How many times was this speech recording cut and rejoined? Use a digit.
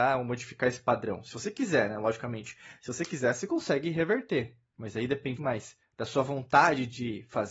2